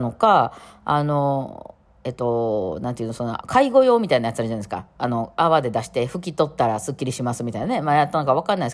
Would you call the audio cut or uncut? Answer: cut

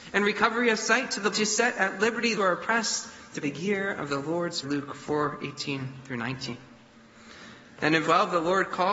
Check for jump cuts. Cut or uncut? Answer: cut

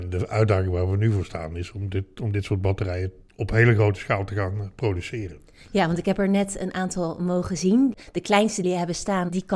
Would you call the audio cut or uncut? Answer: cut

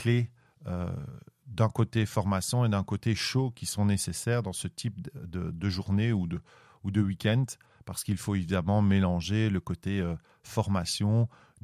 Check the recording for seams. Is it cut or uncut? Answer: uncut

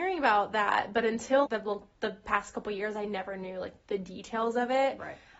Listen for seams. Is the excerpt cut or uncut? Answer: cut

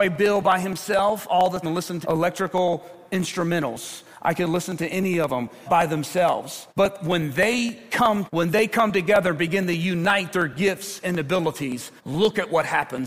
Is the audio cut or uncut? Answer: cut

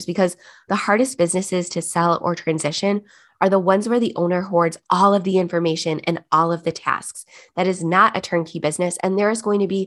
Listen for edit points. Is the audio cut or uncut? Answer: uncut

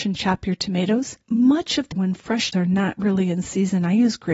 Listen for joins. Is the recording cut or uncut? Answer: cut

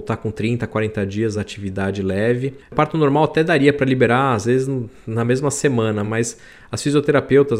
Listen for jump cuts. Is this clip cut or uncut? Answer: uncut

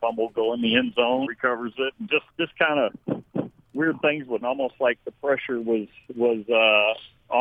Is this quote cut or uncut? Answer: cut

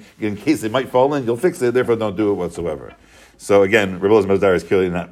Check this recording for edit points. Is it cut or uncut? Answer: uncut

